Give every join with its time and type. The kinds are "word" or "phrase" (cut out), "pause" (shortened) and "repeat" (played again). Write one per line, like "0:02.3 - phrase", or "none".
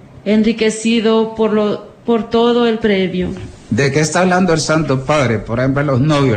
0:02.8 - word